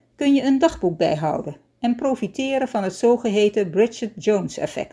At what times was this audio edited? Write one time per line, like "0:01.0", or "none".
none